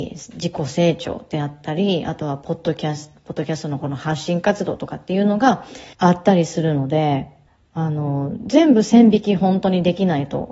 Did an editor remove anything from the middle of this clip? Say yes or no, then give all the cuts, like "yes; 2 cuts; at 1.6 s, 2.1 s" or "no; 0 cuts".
yes; 2 cuts; at 5.9 s, 7.5 s